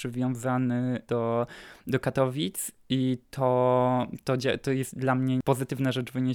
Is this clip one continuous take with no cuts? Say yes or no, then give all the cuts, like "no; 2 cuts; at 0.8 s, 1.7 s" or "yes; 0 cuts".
yes; 0 cuts